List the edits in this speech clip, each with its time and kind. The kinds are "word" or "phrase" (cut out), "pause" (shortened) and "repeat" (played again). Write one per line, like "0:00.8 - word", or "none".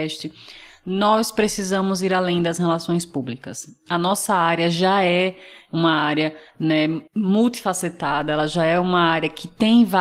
0:07.1 - pause